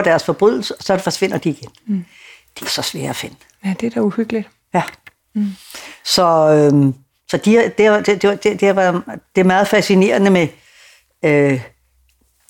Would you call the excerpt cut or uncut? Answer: cut